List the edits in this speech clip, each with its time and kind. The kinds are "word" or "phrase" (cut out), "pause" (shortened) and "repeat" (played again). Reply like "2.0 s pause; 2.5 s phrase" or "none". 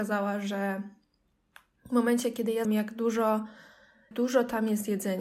2.6 s word; 4.1 s word